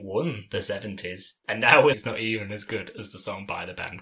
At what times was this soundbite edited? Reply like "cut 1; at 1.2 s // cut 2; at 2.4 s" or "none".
cut 1; at 1.4 s // cut 2; at 1.9 s